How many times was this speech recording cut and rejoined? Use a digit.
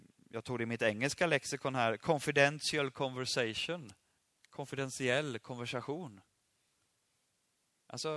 1